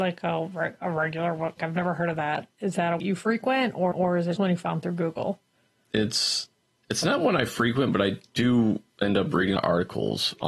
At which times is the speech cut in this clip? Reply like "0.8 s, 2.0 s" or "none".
1.6 s, 3.0 s, 3.9 s, 4.4 s, 8.9 s, 9.6 s